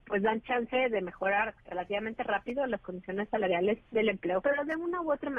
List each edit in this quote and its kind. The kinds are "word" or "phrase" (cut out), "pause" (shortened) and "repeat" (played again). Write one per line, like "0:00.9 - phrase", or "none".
0:01.6 - pause
0:03.9 - pause
0:04.4 - word

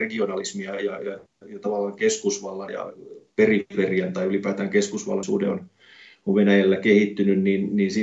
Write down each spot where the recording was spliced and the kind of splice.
0:02.7 - word
0:05.2 - phrase

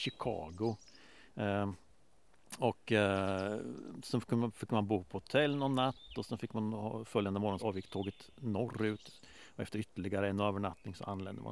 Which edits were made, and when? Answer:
0:07.6 - word

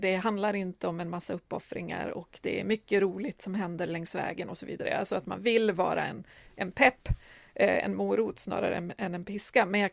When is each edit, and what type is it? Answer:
none

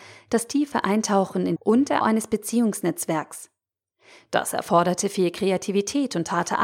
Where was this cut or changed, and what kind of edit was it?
0:01.6 - phrase
0:02.0 - word

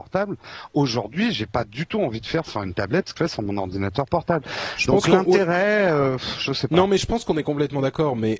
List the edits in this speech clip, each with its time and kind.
0:03.2 - word

